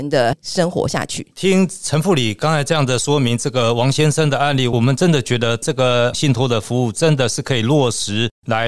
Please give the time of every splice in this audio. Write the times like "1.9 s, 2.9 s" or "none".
1.3 s